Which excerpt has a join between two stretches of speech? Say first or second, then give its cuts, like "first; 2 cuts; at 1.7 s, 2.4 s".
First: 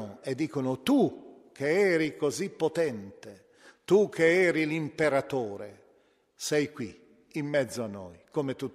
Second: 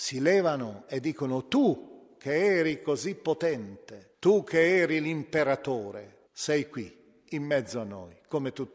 second; 2 cuts; at 4.1 s, 6.3 s